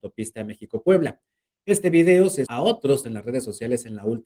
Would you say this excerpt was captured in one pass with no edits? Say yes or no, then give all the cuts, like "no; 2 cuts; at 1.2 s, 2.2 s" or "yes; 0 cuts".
no; 2 cuts; at 2.5 s, 3.0 s